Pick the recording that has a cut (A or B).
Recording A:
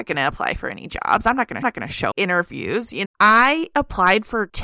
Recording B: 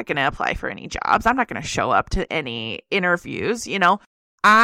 A